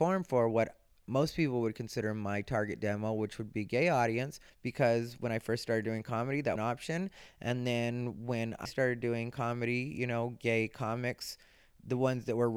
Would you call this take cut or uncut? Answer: cut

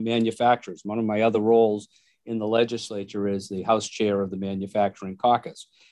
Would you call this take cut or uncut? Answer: uncut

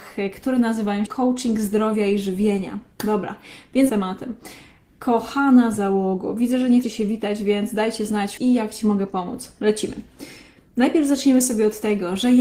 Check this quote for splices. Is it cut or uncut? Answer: cut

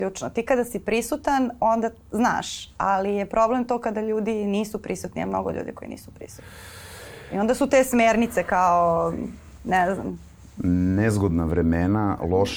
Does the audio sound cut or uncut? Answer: uncut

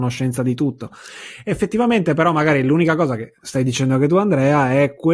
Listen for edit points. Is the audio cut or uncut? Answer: uncut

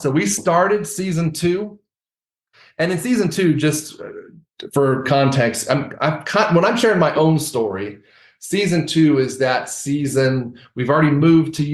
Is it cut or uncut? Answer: uncut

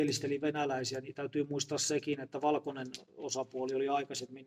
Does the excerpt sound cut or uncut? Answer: uncut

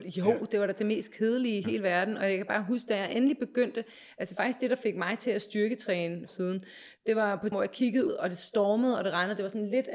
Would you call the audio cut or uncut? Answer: cut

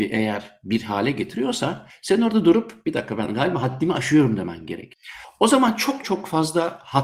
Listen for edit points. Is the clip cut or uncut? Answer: cut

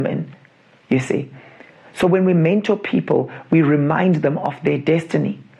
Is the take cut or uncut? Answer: uncut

